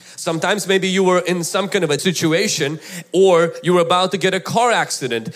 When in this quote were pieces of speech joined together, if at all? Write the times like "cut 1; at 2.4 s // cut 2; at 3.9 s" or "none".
cut 1; at 2.0 s